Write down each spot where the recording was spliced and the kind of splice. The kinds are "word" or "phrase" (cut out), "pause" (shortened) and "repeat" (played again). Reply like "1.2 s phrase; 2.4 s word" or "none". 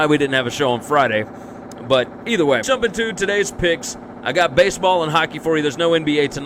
2.6 s phrase